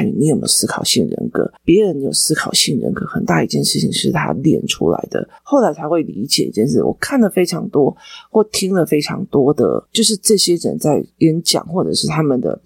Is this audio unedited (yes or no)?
no